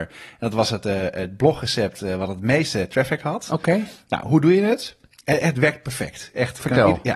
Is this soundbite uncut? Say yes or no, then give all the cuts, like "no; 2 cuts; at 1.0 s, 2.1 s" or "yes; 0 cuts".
yes; 0 cuts